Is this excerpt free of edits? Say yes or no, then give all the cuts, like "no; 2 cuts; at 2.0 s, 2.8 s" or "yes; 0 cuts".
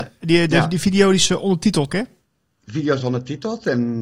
no; 2 cuts; at 1.9 s, 3.0 s